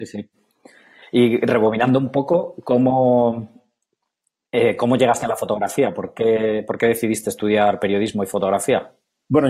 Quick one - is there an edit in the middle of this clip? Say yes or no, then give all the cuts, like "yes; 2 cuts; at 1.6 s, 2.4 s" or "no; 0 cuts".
no; 0 cuts